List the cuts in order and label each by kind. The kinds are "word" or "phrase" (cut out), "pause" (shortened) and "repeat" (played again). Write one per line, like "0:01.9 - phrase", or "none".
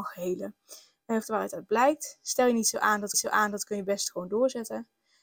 0:01.2 - phrase
0:03.1 - repeat